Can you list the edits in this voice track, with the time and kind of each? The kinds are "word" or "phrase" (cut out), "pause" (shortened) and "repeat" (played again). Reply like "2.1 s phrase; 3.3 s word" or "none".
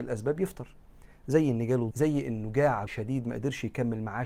1.9 s word; 2.9 s word